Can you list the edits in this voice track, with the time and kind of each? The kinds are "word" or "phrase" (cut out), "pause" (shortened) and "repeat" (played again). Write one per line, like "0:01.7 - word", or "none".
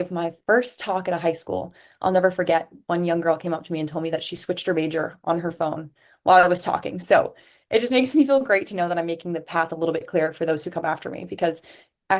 none